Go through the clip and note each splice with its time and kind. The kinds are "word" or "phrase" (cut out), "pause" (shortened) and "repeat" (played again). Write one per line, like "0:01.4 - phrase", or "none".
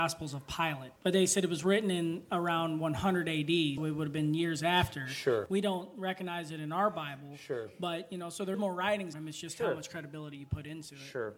0:01.0 - pause
0:03.8 - word
0:08.5 - word
0:09.1 - word